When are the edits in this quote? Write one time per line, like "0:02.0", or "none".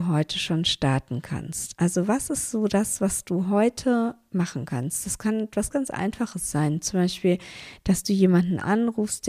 0:05.7